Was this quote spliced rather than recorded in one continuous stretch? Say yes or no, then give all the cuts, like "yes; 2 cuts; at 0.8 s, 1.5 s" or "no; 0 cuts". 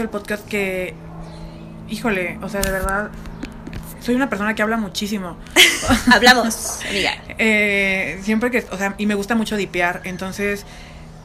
no; 0 cuts